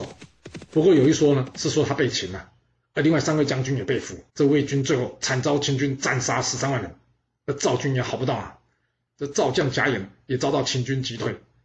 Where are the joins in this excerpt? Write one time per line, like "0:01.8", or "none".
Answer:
0:04.3